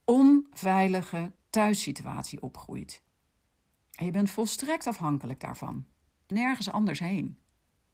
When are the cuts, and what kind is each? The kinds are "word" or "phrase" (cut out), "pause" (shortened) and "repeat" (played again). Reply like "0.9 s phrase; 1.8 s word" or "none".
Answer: 6.3 s word